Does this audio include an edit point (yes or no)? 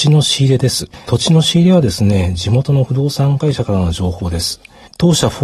no